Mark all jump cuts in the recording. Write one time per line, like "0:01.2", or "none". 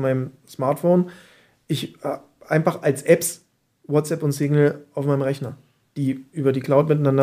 none